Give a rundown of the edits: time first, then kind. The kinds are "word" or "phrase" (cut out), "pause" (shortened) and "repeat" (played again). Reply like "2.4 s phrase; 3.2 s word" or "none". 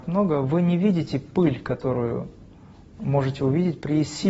none